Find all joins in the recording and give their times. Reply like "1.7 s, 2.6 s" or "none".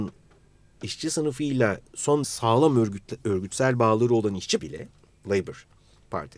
2.2 s, 4.6 s